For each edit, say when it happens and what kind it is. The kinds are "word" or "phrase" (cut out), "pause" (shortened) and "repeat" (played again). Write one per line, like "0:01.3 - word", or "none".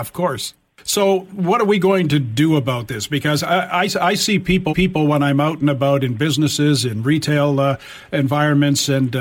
0:04.7 - repeat